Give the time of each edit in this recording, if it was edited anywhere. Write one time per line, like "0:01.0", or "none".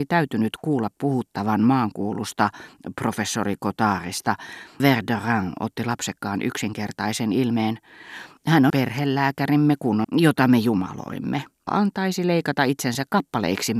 0:04.8
0:08.7
0:10.0
0:11.7